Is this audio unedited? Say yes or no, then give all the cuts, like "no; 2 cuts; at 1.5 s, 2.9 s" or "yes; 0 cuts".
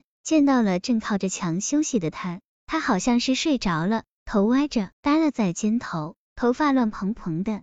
no; 1 cut; at 4.9 s